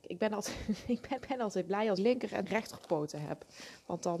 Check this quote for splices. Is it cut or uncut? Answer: cut